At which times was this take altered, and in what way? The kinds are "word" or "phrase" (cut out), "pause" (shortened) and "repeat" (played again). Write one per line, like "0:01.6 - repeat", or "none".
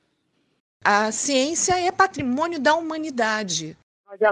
none